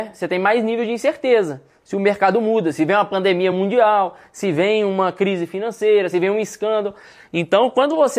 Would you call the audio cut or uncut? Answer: uncut